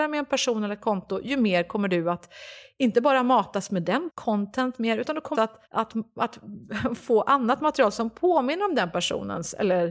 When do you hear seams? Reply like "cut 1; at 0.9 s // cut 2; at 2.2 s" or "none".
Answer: cut 1; at 4.1 s // cut 2; at 5.3 s // cut 3; at 5.7 s

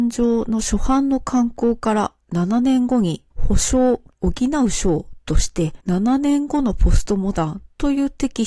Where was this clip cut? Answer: cut 1; at 3.3 s // cut 2; at 4.1 s // cut 3; at 5.8 s

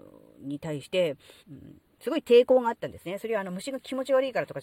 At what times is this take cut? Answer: cut 1; at 1.4 s

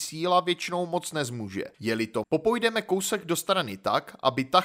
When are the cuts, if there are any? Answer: cut 1; at 1.7 s // cut 2; at 2.2 s

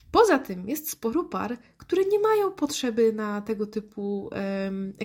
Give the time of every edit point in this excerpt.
none

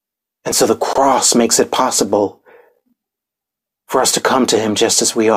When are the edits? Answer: none

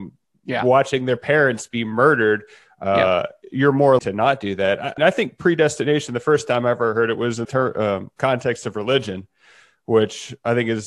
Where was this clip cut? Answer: cut 1; at 4.0 s // cut 2; at 5.0 s // cut 3; at 7.4 s

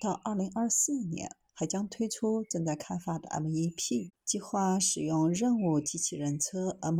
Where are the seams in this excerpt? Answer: cut 1; at 4.2 s

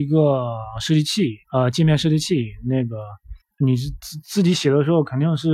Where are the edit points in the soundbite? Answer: cut 1; at 1.4 s // cut 2; at 3.4 s

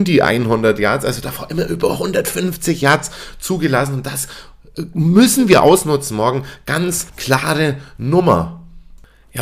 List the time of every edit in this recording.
cut 1; at 7.1 s

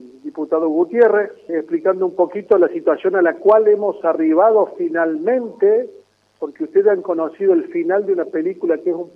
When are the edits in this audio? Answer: cut 1; at 1.5 s

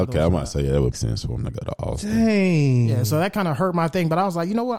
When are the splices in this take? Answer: cut 1; at 0.9 s

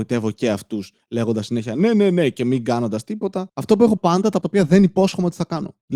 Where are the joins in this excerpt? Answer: cut 1; at 4.0 s // cut 2; at 4.4 s

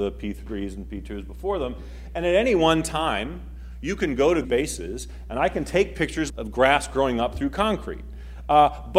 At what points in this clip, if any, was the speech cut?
cut 1; at 4.4 s // cut 2; at 6.3 s

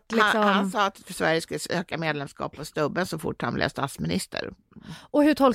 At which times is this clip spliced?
none

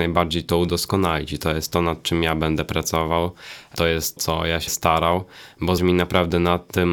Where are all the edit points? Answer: cut 1; at 4.2 s // cut 2; at 4.7 s // cut 3; at 5.8 s

